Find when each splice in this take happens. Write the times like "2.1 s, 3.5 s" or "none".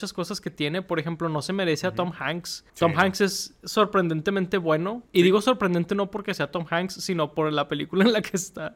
2.7 s, 5.1 s